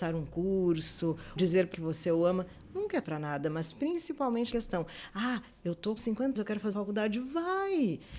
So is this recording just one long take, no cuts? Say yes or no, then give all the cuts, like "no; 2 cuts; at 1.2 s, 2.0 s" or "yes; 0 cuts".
no; 7 cuts; at 1.4 s, 1.7 s, 3.0 s, 4.5 s, 6.0 s, 6.3 s, 6.7 s